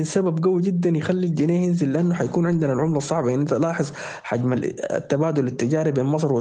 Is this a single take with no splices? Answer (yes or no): yes